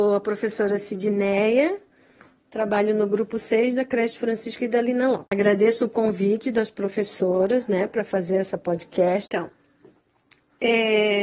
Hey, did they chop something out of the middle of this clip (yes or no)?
no